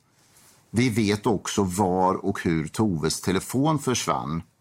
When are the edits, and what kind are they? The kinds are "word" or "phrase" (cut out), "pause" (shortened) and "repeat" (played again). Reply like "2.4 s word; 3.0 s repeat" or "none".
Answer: none